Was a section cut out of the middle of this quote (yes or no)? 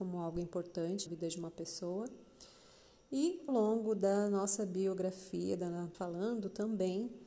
yes